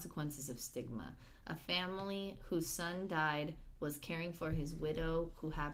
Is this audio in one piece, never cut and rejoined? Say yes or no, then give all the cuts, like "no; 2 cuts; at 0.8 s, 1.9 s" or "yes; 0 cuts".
yes; 0 cuts